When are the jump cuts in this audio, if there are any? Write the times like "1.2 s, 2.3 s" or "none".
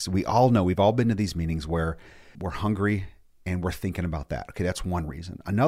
2.3 s